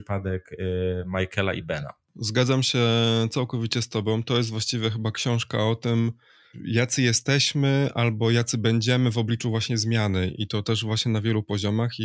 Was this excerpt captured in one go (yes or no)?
yes